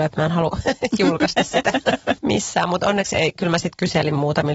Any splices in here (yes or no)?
no